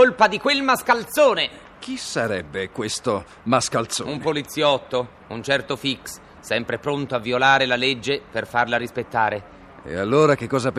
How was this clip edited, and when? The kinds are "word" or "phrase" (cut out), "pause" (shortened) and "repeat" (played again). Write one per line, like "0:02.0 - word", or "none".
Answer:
none